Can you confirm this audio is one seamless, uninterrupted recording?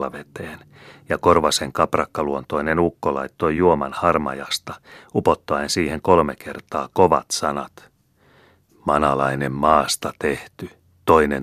yes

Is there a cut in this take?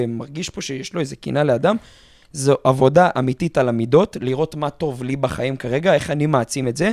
no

